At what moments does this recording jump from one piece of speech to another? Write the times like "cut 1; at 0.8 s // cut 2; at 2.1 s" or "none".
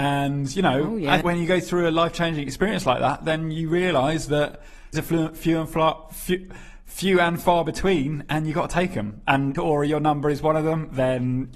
cut 1; at 1.2 s // cut 2; at 4.9 s // cut 3; at 9.5 s